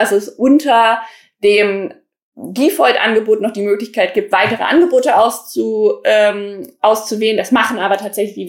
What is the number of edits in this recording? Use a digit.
0